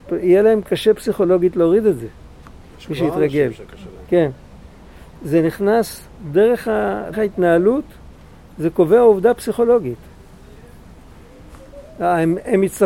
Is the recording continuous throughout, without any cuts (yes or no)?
no